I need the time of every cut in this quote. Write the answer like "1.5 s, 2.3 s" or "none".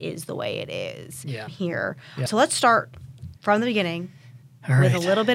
3.4 s